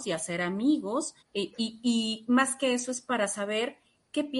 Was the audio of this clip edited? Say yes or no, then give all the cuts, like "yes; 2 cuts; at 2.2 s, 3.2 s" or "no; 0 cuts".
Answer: yes; 1 cut; at 1.2 s